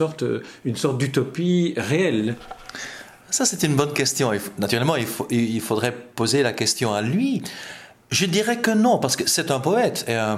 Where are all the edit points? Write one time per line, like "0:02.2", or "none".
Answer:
none